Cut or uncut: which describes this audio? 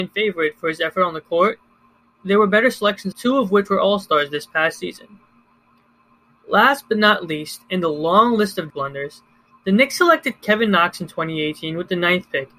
cut